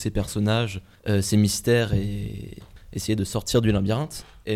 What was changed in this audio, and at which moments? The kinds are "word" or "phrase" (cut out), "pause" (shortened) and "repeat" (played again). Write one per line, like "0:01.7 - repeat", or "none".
none

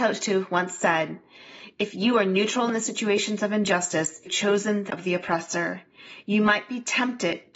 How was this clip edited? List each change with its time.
0:04.3 - word
0:04.9 - word

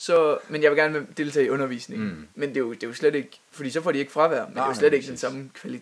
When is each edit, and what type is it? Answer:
0:02.3 - pause
0:03.5 - pause

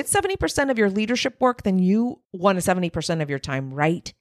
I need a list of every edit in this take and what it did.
0:02.2 - pause
0:02.6 - word

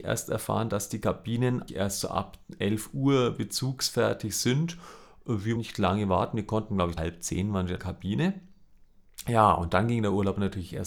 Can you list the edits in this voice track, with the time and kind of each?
0:01.7 - word
0:05.6 - word
0:07.0 - word
0:07.8 - word

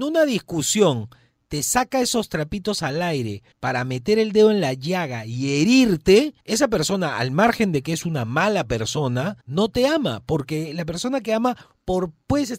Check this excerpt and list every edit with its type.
0:03.5 - pause
0:06.4 - pause
0:09.4 - pause

